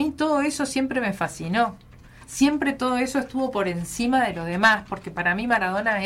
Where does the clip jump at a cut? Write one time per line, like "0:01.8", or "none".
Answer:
none

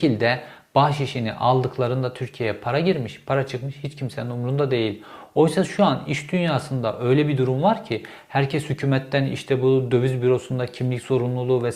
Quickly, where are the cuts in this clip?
none

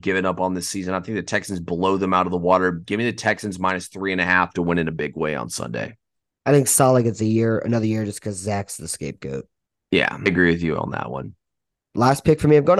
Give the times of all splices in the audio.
0:10.3

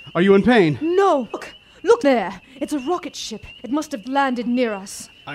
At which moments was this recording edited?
0:01.3
0:02.0
0:02.4
0:03.6
0:04.0

